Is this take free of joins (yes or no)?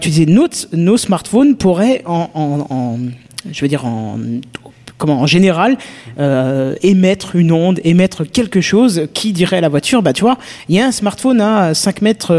yes